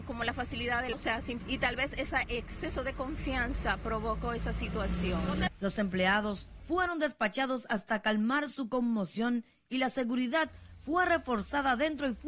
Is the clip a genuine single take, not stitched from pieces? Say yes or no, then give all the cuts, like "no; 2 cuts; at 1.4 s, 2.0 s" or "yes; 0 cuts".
no; 3 cuts; at 0.9 s, 1.4 s, 6.6 s